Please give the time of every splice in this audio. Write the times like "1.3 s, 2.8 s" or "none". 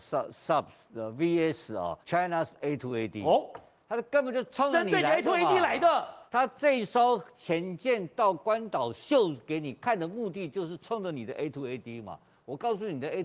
2.0 s, 6.3 s

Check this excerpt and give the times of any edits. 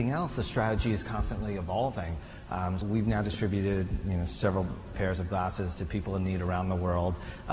2.8 s, 4.9 s, 5.7 s

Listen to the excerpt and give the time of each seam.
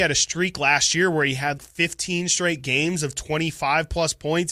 1.6 s

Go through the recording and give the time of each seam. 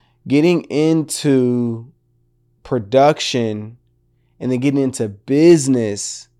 none

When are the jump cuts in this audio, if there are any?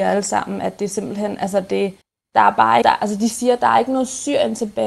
2.0 s, 2.8 s

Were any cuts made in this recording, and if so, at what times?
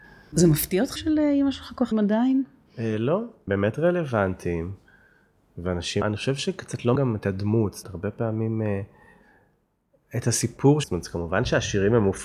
1.0 s, 1.9 s, 3.5 s, 6.0 s, 7.0 s, 7.8 s, 10.8 s

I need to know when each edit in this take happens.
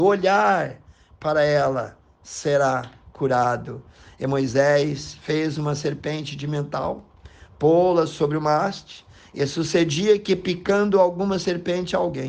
none

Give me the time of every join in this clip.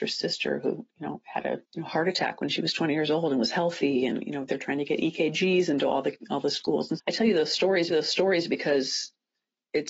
0.9 s, 1.6 s, 7.0 s, 7.9 s

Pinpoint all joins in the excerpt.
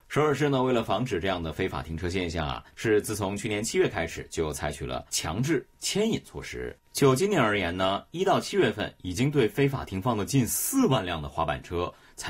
2.7 s, 5.1 s, 6.9 s

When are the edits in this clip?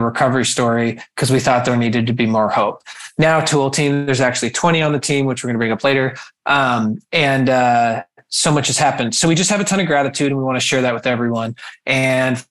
none

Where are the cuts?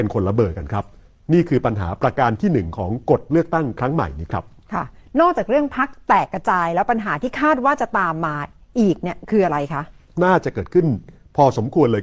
none

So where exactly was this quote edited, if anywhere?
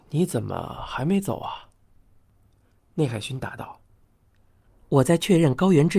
none

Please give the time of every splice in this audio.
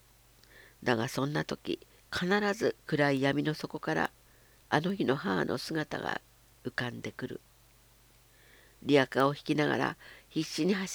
2.8 s

